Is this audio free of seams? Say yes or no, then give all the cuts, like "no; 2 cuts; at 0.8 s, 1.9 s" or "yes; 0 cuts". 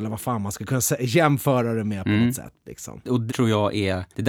no; 1 cut; at 3.3 s